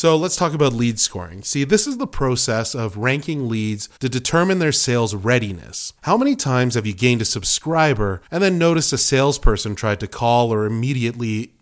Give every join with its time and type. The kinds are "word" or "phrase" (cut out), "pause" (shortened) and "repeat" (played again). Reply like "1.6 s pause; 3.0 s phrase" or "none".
4.0 s pause; 6.0 s pause; 8.3 s pause